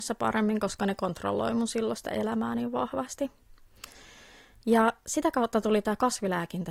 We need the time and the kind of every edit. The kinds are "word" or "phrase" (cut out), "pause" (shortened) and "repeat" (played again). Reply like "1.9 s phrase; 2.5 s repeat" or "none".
none